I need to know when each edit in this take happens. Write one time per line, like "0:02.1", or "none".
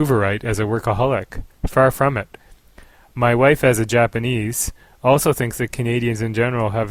none

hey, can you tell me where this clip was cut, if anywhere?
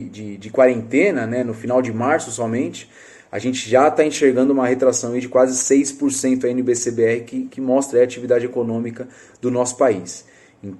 0:07.5

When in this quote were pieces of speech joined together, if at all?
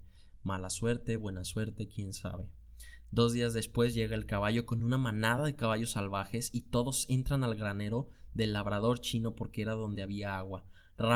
none

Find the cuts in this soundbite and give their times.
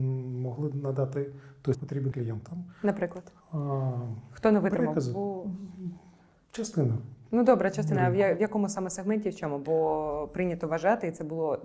0:01.7
0:02.1
0:03.4

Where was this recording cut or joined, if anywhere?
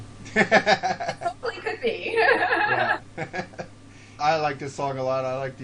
0:04.2

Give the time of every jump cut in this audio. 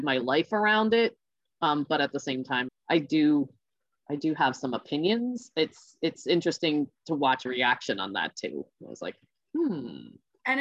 0:02.7
0:07.5

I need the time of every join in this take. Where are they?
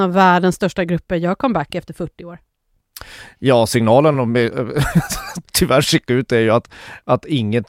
none

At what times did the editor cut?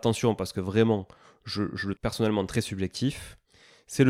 0:01.9

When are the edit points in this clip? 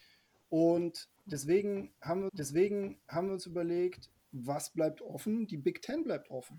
0:02.3
0:04.2

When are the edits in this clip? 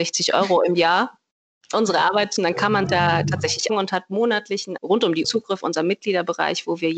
0:01.7
0:02.4
0:02.9
0:03.7
0:04.8
0:05.2
0:05.6

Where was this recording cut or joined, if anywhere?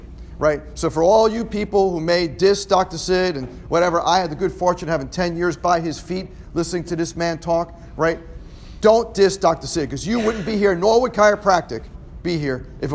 none

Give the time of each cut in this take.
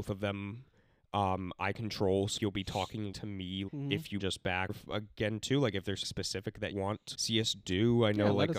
0:02.4
0:03.1
0:03.7
0:04.2
0:04.7
0:06.0
0:06.7
0:07.1

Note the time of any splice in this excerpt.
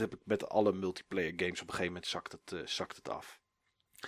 none

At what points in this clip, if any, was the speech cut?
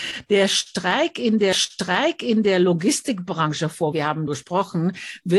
0:01.5
0:03.9
0:04.3

